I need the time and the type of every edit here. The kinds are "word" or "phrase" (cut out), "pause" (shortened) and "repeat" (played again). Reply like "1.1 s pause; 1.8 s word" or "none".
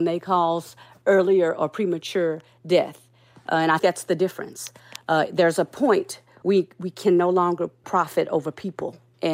3.8 s word; 6.4 s word; 7.8 s word